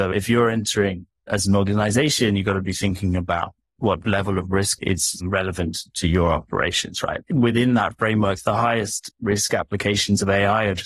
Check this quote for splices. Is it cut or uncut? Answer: cut